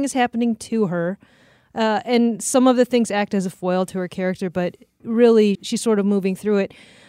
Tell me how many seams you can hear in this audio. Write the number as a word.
one